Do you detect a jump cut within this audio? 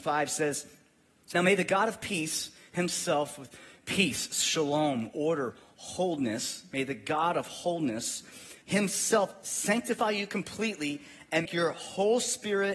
yes; 3 cuts; at 1.3 s, 8.6 s, 11.4 s

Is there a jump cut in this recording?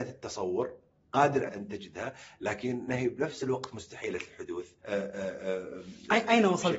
yes; 2 cuts; at 1.5 s, 4.8 s

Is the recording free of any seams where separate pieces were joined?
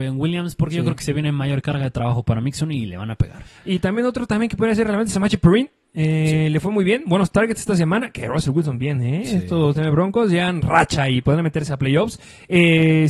yes; 0 cuts

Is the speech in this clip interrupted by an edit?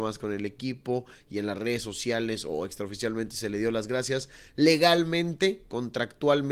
no; 0 cuts

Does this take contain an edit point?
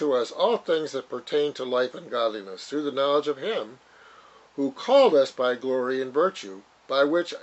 no; 0 cuts

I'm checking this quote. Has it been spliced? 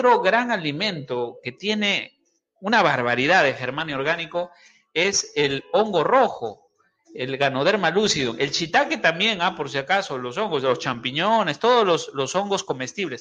no; 0 cuts

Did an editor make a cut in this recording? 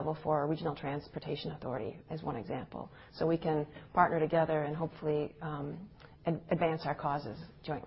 no; 0 cuts

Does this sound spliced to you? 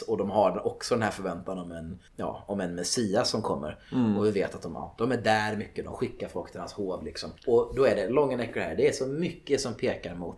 yes; 2 cuts; at 2.1 s, 7.4 s

